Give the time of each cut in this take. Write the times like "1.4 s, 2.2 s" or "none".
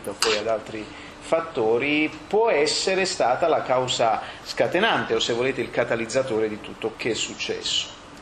6.9 s